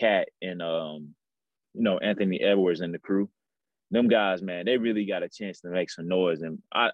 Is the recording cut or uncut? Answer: uncut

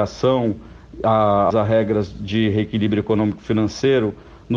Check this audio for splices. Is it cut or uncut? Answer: cut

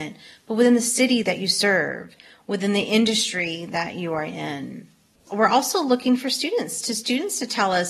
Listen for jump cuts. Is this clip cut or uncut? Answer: uncut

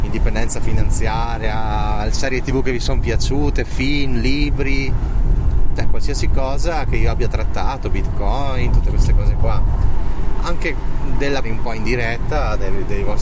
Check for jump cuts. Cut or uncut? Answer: cut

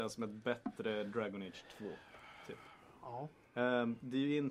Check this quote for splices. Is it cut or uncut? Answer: uncut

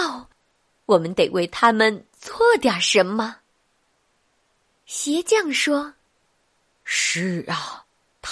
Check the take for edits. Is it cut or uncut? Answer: uncut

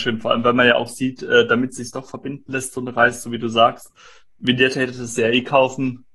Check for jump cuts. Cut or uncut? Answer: uncut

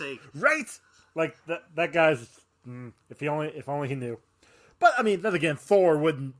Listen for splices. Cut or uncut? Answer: uncut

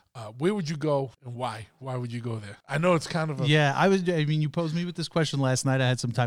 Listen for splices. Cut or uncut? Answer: cut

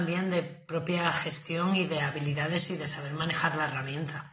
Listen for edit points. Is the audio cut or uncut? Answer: uncut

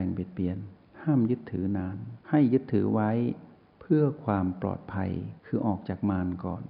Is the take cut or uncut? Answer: cut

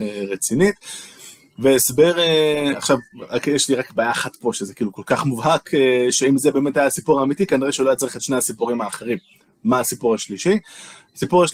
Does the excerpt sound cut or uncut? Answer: uncut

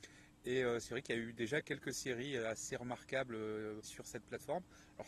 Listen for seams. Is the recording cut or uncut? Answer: cut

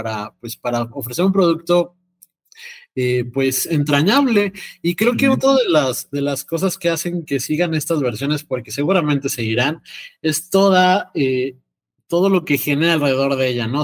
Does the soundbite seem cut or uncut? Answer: uncut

